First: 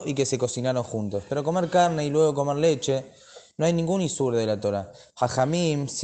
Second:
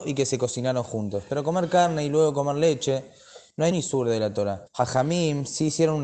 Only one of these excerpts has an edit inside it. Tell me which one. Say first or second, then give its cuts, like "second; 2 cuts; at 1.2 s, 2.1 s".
second; 2 cuts; at 3.7 s, 4.7 s